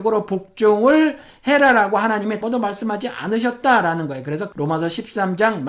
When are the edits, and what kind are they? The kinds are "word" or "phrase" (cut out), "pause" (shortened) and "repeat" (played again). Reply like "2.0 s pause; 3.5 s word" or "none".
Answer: 2.4 s phrase; 4.5 s word